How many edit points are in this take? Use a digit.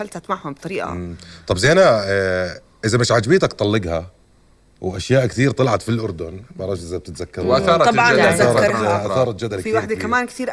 0